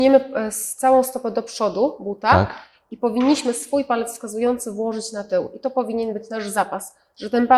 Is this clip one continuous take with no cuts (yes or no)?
yes